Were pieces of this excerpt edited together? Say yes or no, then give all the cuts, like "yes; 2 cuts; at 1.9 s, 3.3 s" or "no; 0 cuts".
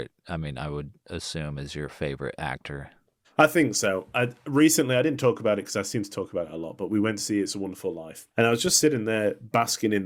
yes; 2 cuts; at 3.2 s, 8.3 s